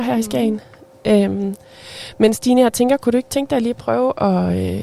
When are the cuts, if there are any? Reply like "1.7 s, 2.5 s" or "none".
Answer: none